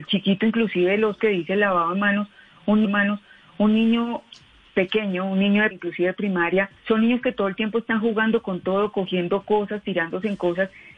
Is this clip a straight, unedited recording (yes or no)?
no